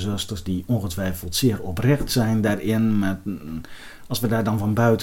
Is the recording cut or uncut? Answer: uncut